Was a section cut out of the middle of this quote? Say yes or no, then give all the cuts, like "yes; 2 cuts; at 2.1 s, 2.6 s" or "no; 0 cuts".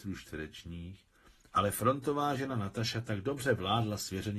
no; 0 cuts